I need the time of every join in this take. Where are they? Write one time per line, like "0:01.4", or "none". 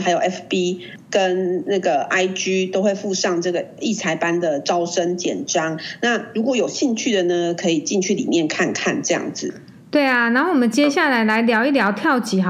none